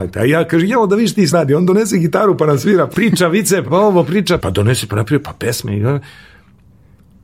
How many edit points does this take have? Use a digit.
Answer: 5